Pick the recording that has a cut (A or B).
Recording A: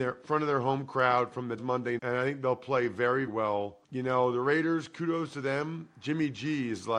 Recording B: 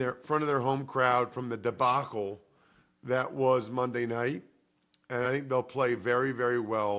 A